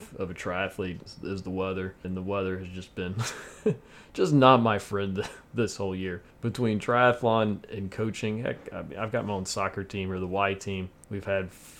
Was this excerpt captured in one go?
no; 1 cut; at 6.3 s

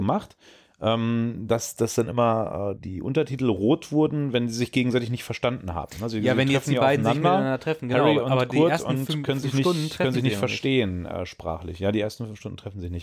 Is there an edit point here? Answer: yes; 1 cut; at 2.8 s

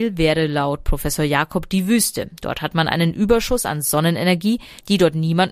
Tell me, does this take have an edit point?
no; 0 cuts

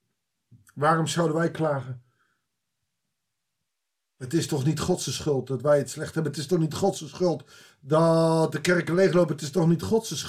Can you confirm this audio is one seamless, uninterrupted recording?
yes; 0 cuts

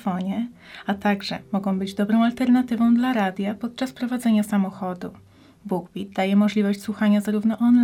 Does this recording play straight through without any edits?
yes; 0 cuts

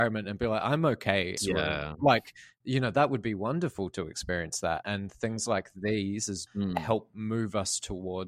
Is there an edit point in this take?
yes; 3 cuts; at 1.4 s, 4.8 s, 6.5 s

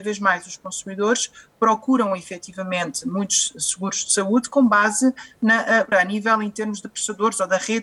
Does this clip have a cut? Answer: yes; 1 cut; at 5.9 s

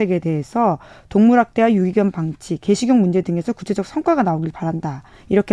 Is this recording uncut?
yes; 0 cuts

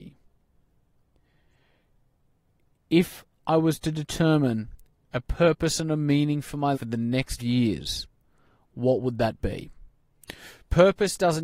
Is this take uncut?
no; 2 cuts; at 6.7 s, 7.4 s

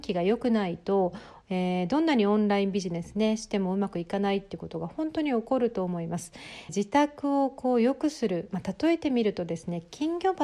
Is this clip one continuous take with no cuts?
no; 1 cut; at 6.7 s

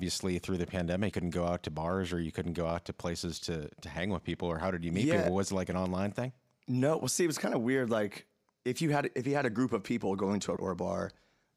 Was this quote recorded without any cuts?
no; 2 cuts; at 1.1 s, 10.6 s

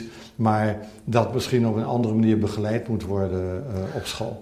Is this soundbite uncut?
yes; 0 cuts

